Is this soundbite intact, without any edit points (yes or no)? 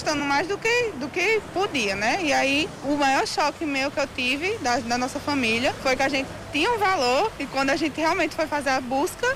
yes